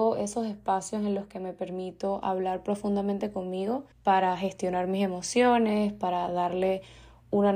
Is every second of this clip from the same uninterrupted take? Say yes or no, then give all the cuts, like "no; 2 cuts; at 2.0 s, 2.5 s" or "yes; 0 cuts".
no; 1 cut; at 3.9 s